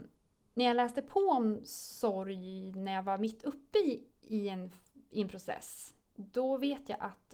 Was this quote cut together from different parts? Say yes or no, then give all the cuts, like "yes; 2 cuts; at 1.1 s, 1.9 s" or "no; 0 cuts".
yes; 1 cut; at 6.0 s